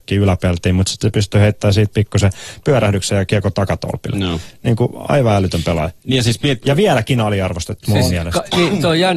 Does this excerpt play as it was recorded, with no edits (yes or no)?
no